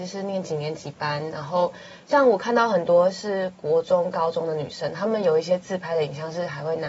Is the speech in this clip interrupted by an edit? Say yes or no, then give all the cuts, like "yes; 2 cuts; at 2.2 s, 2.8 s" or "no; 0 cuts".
no; 0 cuts